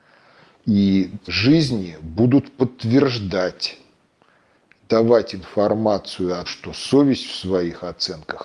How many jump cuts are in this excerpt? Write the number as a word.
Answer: two